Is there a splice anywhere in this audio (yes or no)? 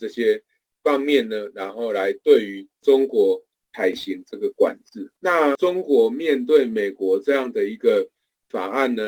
yes